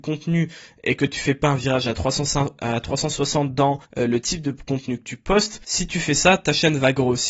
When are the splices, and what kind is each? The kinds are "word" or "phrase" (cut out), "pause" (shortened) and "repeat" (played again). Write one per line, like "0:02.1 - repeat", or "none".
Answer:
0:03.8 - pause